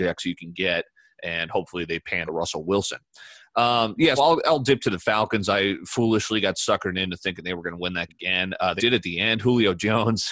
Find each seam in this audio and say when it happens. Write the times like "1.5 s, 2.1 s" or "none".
2.3 s, 4.2 s, 8.1 s, 8.8 s